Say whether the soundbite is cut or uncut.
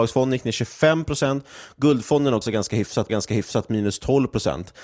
cut